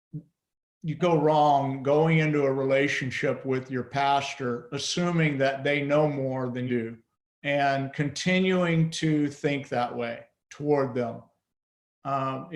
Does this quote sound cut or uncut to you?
cut